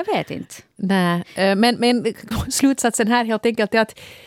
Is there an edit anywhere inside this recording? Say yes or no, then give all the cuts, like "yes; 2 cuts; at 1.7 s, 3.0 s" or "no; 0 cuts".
yes; 1 cut; at 2.3 s